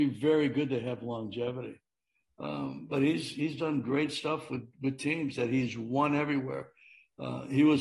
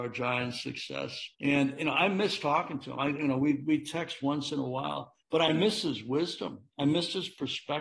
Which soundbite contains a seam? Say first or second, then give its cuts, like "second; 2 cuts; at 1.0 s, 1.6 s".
second; 2 cuts; at 1.3 s, 5.2 s